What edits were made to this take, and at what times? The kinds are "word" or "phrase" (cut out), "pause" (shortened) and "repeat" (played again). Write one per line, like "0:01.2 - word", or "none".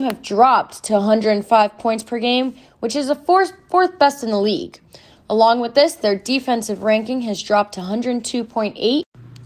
none